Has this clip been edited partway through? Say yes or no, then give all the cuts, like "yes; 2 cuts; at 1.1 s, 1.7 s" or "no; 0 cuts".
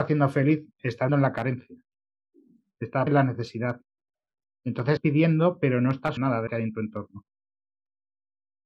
yes; 5 cuts; at 1.1 s, 3.1 s, 5.0 s, 6.2 s, 6.5 s